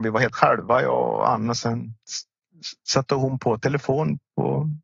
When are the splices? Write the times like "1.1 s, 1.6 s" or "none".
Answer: none